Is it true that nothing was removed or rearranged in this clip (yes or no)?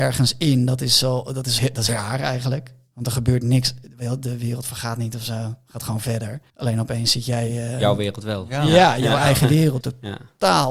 no